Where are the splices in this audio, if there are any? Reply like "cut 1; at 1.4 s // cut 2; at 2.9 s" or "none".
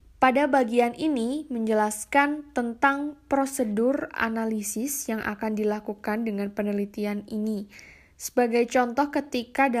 none